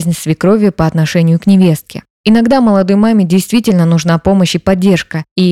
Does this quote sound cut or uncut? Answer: uncut